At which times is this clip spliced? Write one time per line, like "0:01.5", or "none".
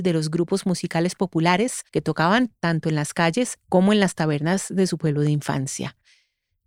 0:01.9